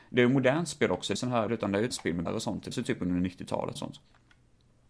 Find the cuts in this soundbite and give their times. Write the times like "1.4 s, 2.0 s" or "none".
1.2 s, 1.5 s, 1.9 s, 2.3 s, 2.7 s, 3.8 s